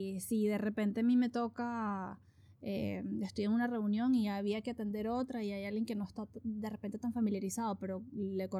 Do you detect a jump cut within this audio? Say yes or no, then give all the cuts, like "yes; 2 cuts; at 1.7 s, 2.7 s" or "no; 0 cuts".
no; 0 cuts